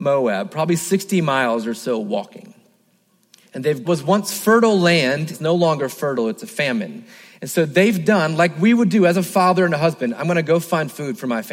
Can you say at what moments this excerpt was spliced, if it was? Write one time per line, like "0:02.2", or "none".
0:03.8
0:05.3